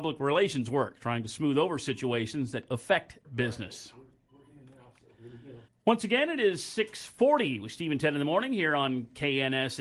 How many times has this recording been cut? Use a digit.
3